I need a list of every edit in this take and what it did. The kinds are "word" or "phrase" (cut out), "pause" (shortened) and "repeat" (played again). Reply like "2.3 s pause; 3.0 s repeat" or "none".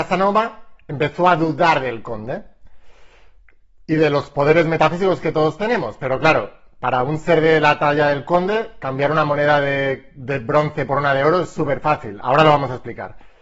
none

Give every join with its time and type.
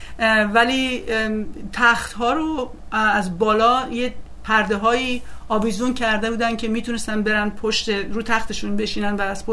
none

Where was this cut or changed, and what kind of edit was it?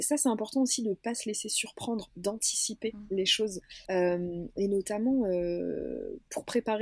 3.8 s pause

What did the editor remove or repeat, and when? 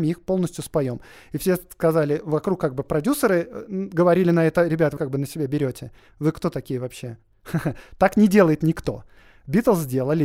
5.0 s word

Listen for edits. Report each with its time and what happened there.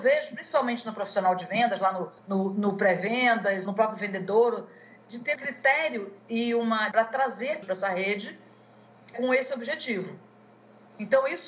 2.2 s pause; 3.6 s word; 5.3 s phrase; 6.9 s word; 7.6 s word; 9.1 s word

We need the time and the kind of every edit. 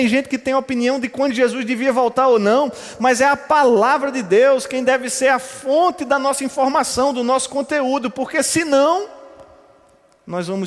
none

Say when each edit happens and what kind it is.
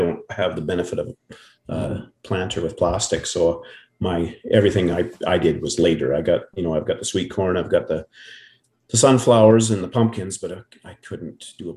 none

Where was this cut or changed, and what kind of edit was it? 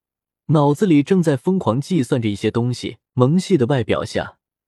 3.1 s pause

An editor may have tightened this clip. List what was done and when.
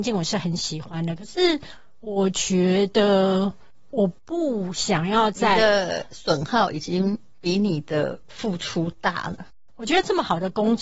4.2 s pause

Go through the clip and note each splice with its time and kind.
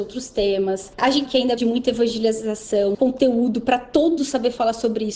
1.3 s word; 1.6 s word; 2.9 s word; 4.2 s word

